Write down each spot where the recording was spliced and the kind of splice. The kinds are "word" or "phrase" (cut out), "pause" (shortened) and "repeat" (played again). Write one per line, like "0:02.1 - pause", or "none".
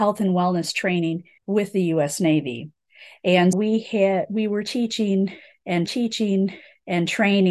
0:01.4 - pause
0:03.5 - word
0:05.9 - repeat